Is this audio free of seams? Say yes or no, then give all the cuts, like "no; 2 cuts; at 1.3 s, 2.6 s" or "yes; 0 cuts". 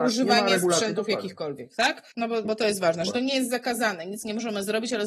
no; 2 cuts; at 2.1 s, 2.4 s